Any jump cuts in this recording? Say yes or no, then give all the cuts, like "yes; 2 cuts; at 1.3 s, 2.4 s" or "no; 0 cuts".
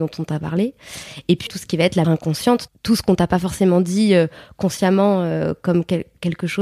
yes; 3 cuts; at 1.5 s, 2.0 s, 2.7 s